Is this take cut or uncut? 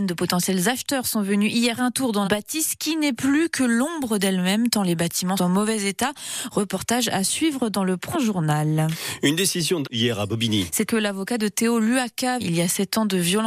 cut